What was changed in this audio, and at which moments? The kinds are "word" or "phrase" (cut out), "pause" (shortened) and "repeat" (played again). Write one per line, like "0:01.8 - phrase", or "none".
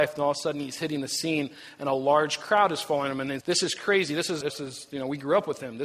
0:03.4 - word
0:04.4 - word